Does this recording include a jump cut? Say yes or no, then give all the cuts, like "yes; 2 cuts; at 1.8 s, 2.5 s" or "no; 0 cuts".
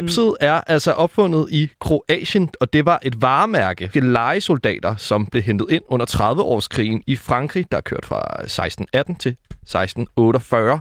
yes; 1 cut; at 3.9 s